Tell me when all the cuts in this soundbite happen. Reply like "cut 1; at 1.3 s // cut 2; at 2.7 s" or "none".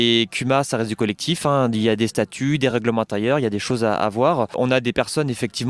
none